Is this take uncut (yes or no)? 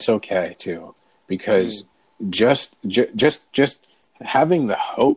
yes